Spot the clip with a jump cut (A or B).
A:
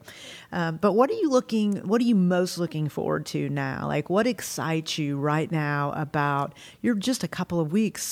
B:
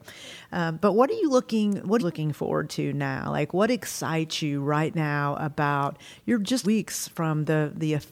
B